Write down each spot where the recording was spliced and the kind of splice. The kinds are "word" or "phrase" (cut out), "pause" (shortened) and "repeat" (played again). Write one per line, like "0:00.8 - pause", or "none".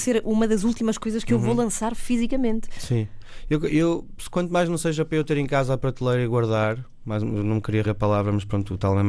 0:07.8 - word